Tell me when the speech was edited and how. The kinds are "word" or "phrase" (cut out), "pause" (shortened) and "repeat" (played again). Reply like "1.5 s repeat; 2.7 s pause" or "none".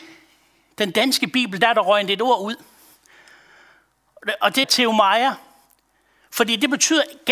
4.6 s word

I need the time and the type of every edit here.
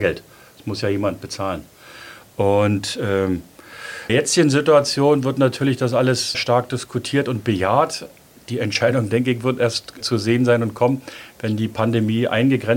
4.1 s word; 6.3 s word; 10.0 s word

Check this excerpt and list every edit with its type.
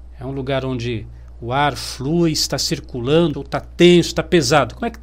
3.3 s word

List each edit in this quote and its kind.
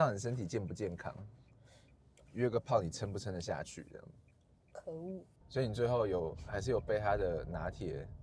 5.4 s pause

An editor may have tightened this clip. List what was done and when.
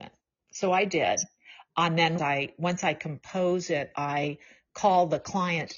2.2 s phrase

